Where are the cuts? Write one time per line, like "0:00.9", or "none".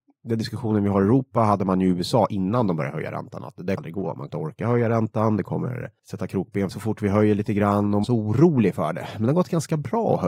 0:03.8
0:04.3
0:06.0
0:06.7
0:08.0